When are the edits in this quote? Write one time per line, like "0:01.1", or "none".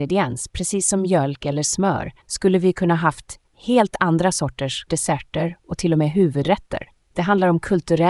0:02.2
0:04.9